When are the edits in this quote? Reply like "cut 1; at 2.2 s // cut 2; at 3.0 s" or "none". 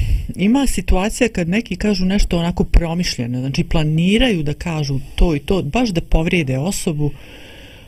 none

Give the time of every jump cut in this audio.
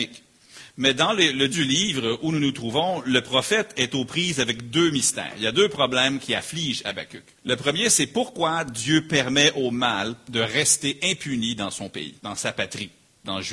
cut 1; at 1.5 s // cut 2; at 7.4 s // cut 3; at 12.2 s

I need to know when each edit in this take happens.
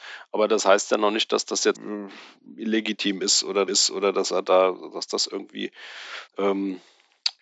cut 1; at 1.7 s // cut 2; at 3.7 s // cut 3; at 6.3 s

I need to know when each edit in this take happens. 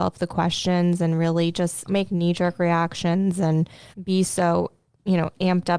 cut 1; at 1.9 s // cut 2; at 3.9 s

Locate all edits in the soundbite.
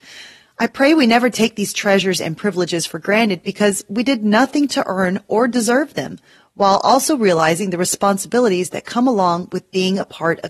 none

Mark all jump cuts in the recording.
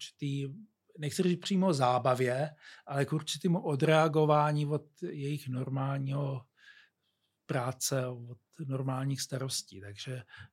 none

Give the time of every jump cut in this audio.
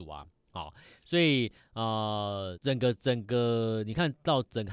cut 1; at 2.5 s

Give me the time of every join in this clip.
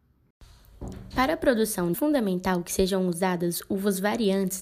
cut 1; at 1.9 s

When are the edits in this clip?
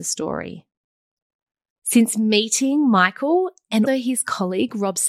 cut 1; at 3.9 s

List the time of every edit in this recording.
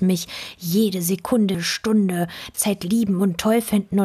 cut 1; at 1.5 s // cut 2; at 2.5 s

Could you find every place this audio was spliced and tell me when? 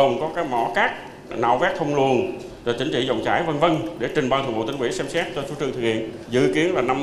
none

